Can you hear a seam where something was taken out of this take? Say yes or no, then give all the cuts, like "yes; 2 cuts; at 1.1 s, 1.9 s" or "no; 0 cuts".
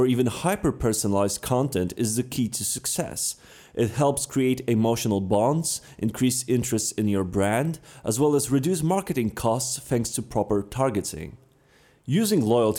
no; 0 cuts